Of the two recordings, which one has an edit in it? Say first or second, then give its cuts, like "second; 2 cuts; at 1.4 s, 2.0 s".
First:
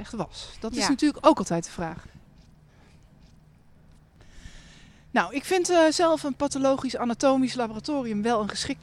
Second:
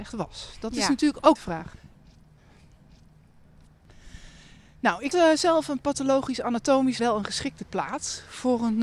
second; 3 cuts; at 1.4 s, 5.1 s, 7.0 s